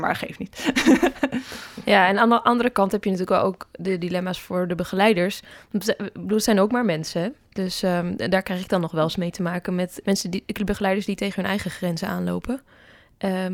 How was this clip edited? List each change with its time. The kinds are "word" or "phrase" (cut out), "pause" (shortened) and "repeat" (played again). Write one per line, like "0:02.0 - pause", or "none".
0:10.0 - word